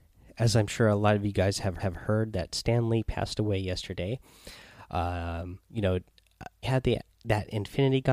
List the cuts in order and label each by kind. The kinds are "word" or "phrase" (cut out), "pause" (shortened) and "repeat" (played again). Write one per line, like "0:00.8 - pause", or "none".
0:01.8 - repeat
0:05.6 - pause
0:06.6 - word